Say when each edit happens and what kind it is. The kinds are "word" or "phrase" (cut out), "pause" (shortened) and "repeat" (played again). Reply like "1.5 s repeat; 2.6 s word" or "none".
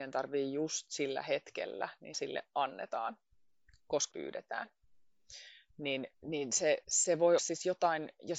2.1 s word; 4.1 s word; 6.1 s pause; 6.8 s pause; 7.4 s word